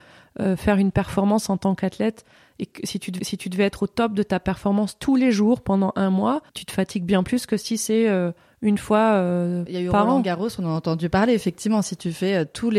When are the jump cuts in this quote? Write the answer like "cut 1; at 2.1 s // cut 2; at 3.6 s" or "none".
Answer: cut 1; at 3.2 s // cut 2; at 6.5 s